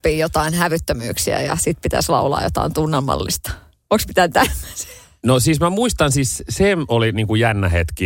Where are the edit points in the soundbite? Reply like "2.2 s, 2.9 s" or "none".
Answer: none

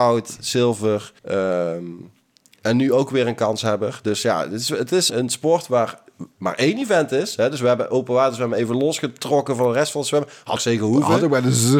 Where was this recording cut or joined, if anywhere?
1.2 s, 5.1 s, 10.6 s

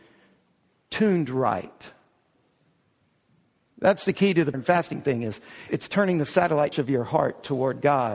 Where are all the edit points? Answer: 4.5 s, 5.7 s, 6.7 s

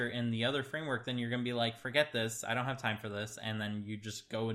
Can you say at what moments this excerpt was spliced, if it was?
none

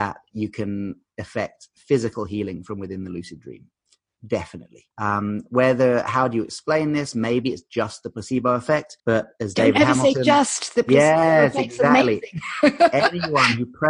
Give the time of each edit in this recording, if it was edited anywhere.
4.9 s, 9.0 s

